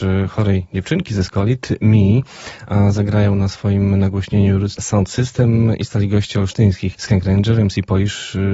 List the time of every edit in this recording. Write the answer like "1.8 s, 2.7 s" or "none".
4.7 s, 6.9 s